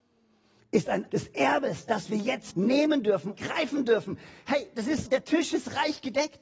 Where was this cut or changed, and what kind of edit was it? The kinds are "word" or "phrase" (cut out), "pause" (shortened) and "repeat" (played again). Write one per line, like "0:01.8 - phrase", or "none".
0:01.1 - word
0:02.5 - word
0:03.3 - word
0:05.0 - word